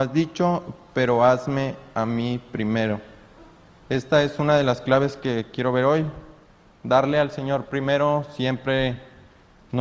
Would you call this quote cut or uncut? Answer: uncut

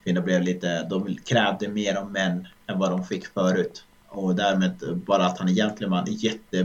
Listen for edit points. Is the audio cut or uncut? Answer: uncut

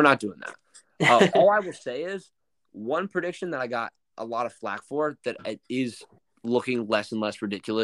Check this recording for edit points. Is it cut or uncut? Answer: uncut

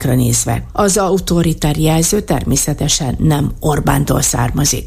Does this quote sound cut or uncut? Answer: uncut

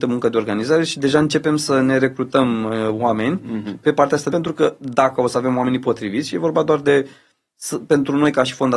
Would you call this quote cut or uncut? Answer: cut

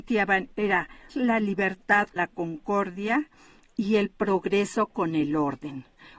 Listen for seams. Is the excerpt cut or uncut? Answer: cut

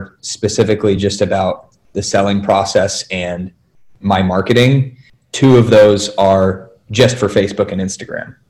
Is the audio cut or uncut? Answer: uncut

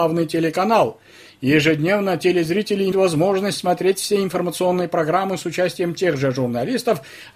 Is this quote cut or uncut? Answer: cut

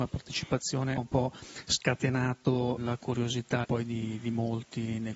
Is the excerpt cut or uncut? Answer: cut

